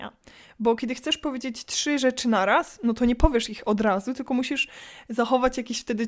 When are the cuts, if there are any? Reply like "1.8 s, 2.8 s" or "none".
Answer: none